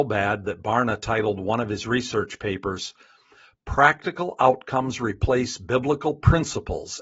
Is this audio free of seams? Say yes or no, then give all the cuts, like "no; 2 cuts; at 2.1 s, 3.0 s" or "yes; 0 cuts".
yes; 0 cuts